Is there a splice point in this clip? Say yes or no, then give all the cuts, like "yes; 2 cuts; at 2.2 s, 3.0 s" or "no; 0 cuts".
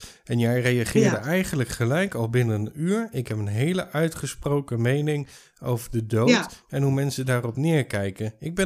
no; 0 cuts